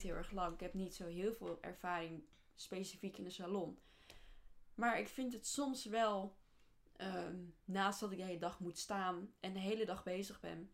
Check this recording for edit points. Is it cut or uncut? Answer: uncut